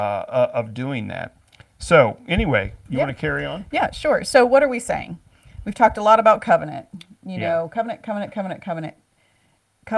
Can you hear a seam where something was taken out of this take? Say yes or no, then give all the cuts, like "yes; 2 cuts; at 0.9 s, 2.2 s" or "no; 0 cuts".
no; 0 cuts